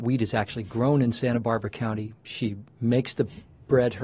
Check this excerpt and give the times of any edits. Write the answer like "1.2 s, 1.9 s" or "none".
2.2 s